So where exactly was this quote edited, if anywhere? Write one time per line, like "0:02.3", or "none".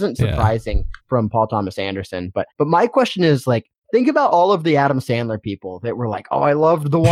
0:01.0
0:02.5
0:03.7